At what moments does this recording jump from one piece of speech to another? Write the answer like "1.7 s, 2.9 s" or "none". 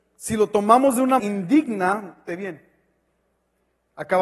1.2 s, 2.3 s